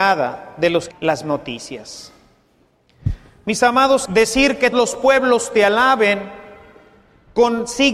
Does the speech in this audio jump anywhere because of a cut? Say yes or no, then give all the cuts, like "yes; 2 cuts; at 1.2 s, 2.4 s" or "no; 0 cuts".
yes; 4 cuts; at 0.9 s, 1.2 s, 4.1 s, 4.7 s